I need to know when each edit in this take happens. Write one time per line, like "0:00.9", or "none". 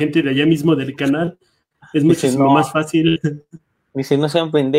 none

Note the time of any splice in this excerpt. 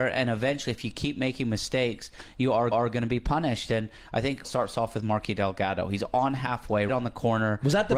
0:02.7
0:04.4
0:06.9

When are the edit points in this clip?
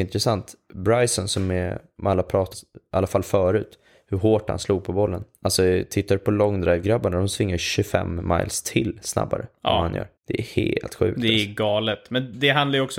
0:02.5
0:05.3
0:10.2

